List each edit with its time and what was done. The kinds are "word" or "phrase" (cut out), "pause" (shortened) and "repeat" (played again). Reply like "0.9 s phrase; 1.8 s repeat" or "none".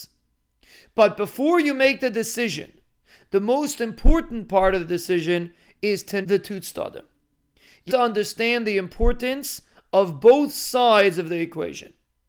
6.2 s word; 7.9 s word